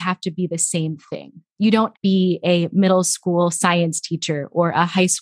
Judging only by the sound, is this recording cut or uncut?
cut